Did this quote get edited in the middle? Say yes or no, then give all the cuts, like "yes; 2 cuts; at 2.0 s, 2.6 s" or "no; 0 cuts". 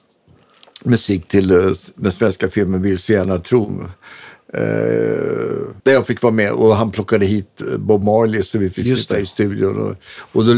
yes; 1 cut; at 5.8 s